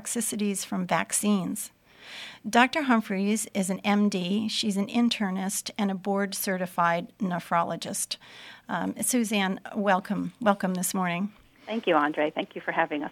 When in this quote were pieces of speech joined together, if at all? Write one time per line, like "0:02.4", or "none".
none